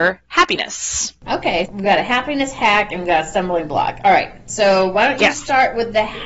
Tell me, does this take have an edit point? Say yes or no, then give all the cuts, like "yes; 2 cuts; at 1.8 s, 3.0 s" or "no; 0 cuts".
yes; 1 cut; at 1.7 s